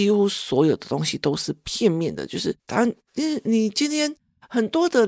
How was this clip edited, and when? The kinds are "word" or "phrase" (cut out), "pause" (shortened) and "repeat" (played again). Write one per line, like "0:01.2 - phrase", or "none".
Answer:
0:02.6 - pause